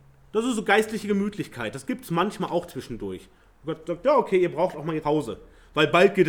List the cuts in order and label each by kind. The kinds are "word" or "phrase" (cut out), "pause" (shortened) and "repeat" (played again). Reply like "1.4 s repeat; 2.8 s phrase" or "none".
5.0 s word